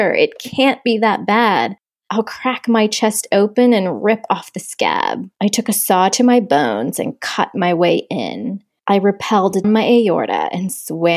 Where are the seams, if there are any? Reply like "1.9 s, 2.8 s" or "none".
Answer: 2.0 s, 5.3 s, 8.8 s, 9.6 s